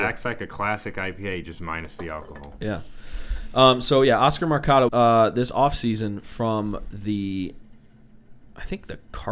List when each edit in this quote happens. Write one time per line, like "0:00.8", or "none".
0:04.9